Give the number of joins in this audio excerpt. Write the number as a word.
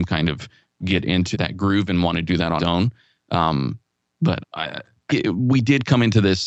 four